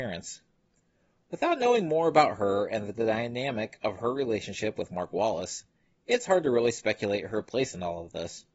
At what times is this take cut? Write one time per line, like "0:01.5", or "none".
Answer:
none